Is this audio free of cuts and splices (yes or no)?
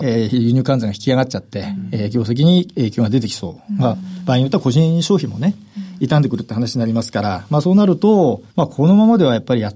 no